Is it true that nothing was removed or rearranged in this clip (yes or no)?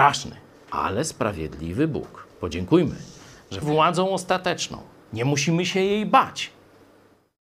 no